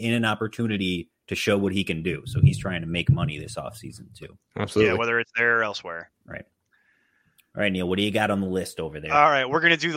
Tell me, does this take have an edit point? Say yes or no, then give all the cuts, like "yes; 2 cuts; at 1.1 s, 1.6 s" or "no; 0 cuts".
no; 0 cuts